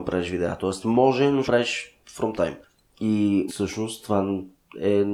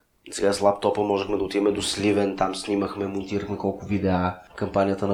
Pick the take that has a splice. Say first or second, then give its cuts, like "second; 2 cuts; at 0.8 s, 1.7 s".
first; 3 cuts; at 1.5 s, 2.3 s, 3.5 s